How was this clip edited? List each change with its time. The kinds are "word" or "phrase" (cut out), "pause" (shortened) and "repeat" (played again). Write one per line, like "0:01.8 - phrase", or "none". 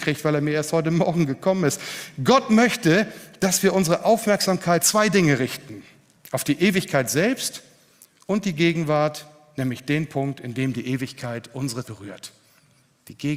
0:04.8 - phrase
0:11.8 - word